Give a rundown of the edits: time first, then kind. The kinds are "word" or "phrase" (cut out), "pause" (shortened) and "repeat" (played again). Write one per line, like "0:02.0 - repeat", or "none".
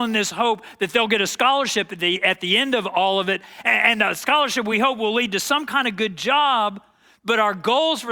none